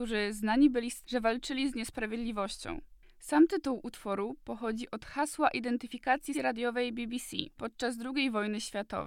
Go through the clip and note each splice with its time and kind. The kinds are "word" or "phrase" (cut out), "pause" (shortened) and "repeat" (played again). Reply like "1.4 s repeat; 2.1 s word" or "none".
1.0 s word; 6.3 s word; 7.6 s word